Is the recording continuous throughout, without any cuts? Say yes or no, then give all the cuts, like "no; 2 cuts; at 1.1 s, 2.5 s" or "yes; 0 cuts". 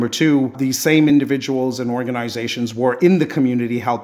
yes; 0 cuts